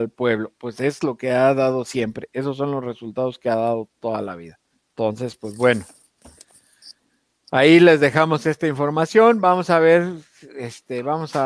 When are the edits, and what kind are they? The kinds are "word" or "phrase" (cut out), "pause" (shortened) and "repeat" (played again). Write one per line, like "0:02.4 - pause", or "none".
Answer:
0:04.7 - pause